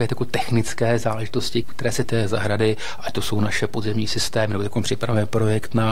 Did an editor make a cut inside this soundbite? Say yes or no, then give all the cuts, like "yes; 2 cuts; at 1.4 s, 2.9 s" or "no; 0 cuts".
yes; 2 cuts; at 1.6 s, 2.0 s